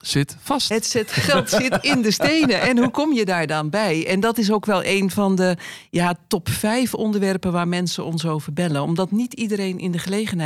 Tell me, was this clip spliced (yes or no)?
no